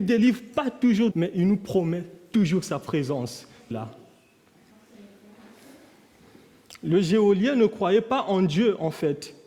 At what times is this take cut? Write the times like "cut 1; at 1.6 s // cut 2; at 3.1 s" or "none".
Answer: cut 1; at 1.1 s // cut 2; at 3.7 s